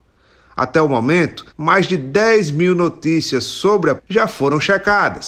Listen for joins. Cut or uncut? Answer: cut